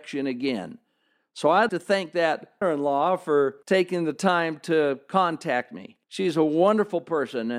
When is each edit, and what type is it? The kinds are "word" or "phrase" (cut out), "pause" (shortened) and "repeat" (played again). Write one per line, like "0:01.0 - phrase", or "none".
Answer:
0:01.7 - word
0:02.6 - word
0:03.6 - pause
0:06.0 - pause